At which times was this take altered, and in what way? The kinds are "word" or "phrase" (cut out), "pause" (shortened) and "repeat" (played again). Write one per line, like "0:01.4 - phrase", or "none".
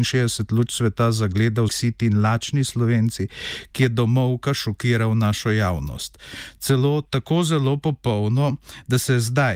0:01.7 - word

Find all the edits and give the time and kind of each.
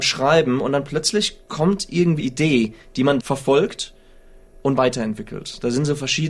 0:02.2 - word
0:03.2 - word
0:04.8 - word

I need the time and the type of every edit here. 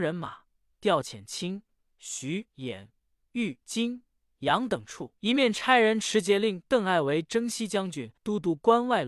0:02.5 - pause
0:03.6 - pause
0:05.2 - pause
0:08.2 - pause

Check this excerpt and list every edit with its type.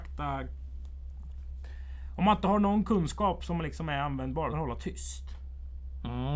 0:04.5 - phrase

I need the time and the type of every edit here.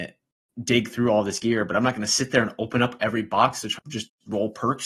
0:03.8 - word

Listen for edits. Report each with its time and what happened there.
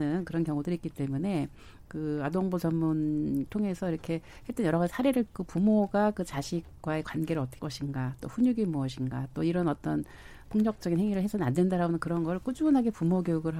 0:03.5 - word
0:05.3 - word
0:07.6 - word
0:10.4 - word

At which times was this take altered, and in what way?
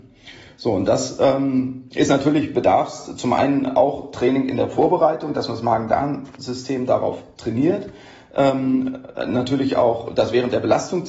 none

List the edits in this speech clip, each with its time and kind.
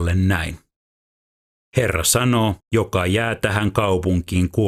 0:02.6 - pause

